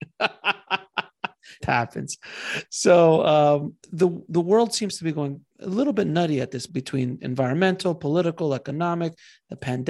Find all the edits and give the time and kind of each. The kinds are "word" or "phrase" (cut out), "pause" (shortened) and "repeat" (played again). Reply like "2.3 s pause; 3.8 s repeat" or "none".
1.6 s word; 3.8 s pause; 5.5 s pause; 6.7 s word